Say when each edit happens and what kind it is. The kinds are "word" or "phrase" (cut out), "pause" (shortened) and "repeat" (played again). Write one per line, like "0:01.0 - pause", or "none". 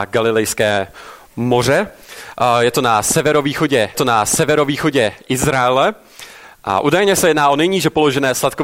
0:03.9 - repeat